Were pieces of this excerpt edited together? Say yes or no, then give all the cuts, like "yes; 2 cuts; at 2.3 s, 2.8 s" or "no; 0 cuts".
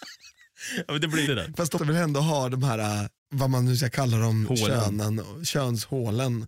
yes; 3 cuts; at 1.3 s, 1.8 s, 3.2 s